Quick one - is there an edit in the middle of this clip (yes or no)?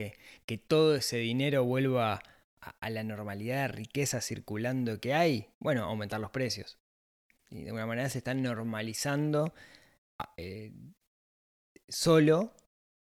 no